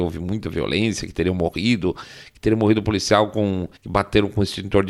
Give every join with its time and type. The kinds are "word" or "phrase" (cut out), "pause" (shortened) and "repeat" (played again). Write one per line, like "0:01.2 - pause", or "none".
0:03.8 - pause